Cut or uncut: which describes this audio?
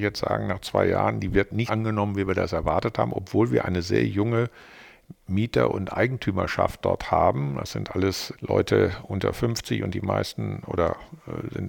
cut